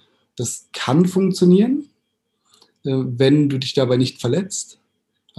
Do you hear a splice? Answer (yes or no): no